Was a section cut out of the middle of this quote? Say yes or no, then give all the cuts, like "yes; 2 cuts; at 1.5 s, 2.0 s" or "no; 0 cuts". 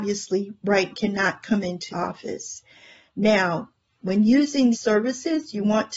yes; 3 cuts; at 0.9 s, 1.9 s, 4.7 s